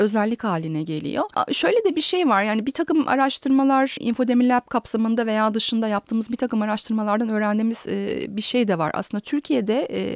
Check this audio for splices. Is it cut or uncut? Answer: uncut